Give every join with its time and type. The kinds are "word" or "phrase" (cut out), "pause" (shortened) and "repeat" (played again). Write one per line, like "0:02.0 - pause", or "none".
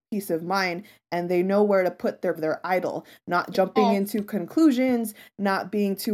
0:02.4 - phrase